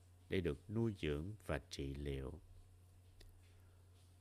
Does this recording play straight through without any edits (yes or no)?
yes